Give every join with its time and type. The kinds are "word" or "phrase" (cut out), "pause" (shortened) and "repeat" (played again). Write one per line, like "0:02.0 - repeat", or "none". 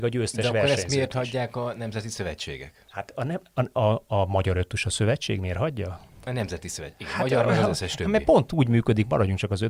0:02.9 - pause